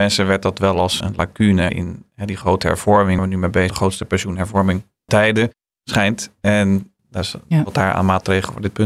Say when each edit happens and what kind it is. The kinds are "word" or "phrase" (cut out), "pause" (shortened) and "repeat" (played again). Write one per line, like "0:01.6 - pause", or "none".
0:01.0 - word
0:01.7 - word
0:03.2 - word
0:03.7 - word
0:05.1 - word
0:05.8 - word
0:07.0 - word